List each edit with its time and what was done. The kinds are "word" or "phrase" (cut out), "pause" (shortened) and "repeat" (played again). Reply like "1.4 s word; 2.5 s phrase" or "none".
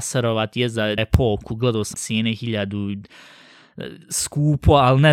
1.0 s word; 1.9 s word; 4.0 s pause

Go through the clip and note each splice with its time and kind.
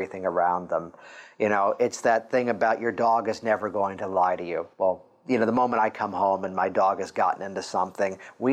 4.7 s pause

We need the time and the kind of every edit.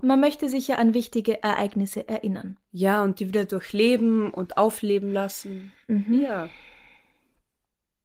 none

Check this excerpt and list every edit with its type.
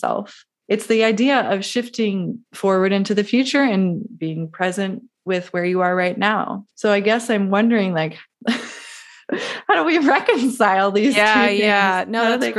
2.5 s pause; 6.7 s pause

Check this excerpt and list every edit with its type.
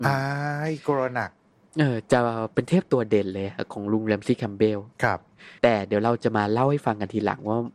1.5 s pause; 4.9 s pause; 5.6 s pause

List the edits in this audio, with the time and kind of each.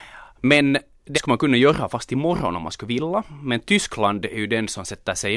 1.1 s word

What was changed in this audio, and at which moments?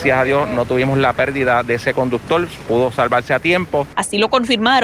none

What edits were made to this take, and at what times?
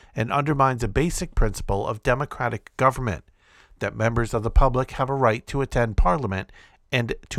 none

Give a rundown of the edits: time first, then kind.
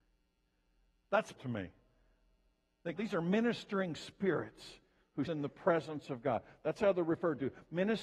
1.4 s word; 3.0 s word; 5.3 s word

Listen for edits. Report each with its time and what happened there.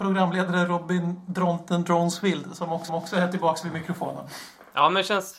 2.9 s repeat

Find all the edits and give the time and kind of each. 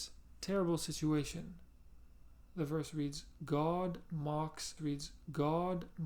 4.8 s repeat

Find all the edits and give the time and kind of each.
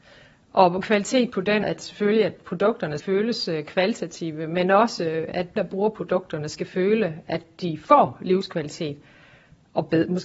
1.6 s word; 2.4 s word; 3.0 s word; 5.6 s word

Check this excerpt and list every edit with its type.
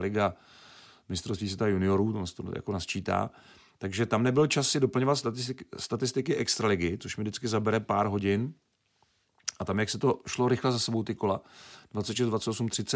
none

